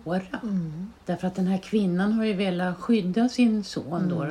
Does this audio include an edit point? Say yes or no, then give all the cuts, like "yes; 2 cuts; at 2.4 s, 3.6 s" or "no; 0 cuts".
yes; 1 cut; at 1.0 s